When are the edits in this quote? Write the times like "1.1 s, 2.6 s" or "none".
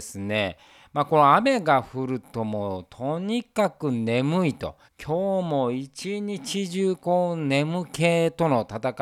4.8 s